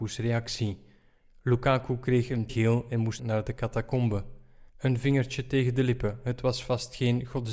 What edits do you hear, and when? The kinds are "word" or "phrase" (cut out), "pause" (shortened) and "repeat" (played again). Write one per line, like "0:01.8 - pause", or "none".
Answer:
0:02.5 - word
0:03.2 - word
0:04.7 - pause